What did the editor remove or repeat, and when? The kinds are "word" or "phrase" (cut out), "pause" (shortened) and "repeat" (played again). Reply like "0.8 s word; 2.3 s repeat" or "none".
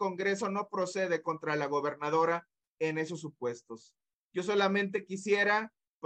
none